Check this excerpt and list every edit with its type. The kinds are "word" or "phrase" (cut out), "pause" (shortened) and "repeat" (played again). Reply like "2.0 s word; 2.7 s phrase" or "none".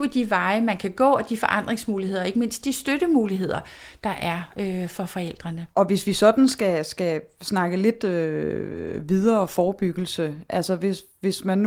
5.7 s pause